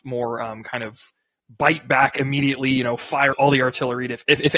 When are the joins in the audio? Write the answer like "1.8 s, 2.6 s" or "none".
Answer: 3.3 s